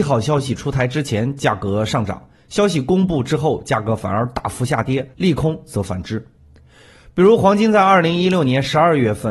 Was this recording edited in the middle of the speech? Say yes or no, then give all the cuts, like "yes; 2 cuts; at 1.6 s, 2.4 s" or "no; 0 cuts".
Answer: yes; 1 cut; at 5.1 s